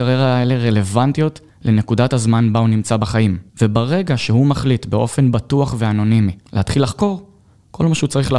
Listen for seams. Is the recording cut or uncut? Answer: cut